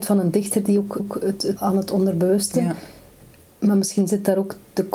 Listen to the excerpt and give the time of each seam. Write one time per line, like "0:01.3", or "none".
0:01.0
0:01.6